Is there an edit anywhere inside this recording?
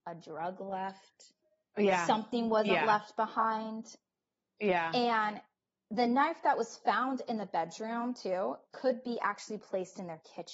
no; 0 cuts

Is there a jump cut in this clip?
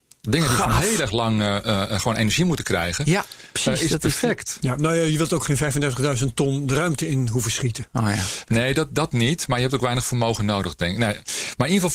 no; 0 cuts

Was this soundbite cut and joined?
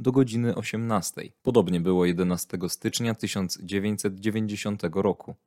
yes; 1 cut; at 1.4 s

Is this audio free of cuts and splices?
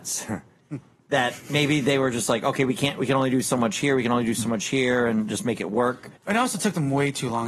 no; 1 cut; at 6.2 s

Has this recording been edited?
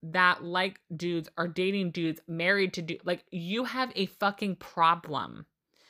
no; 0 cuts

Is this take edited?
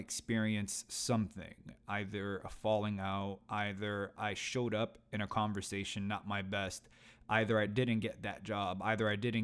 no; 0 cuts

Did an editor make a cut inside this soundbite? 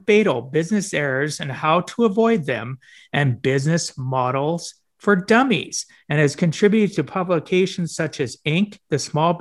no; 0 cuts

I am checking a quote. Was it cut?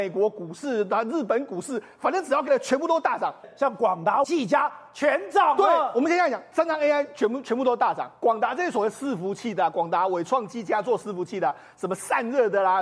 yes; 3 cuts; at 2.5 s, 4.2 s, 6.5 s

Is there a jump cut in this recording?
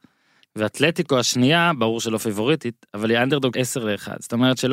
yes; 1 cut; at 3.5 s

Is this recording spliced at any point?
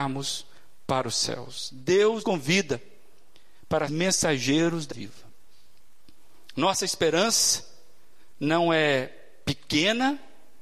yes; 3 cuts; at 2.2 s, 3.9 s, 4.9 s

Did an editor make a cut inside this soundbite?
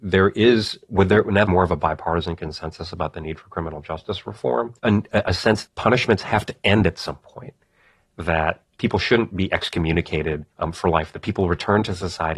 yes; 5 cuts; at 1.5 s, 4.8 s, 5.7 s, 8.7 s, 10.5 s

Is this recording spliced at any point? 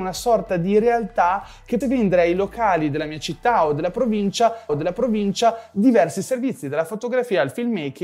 yes; 2 cuts; at 1.8 s, 4.7 s

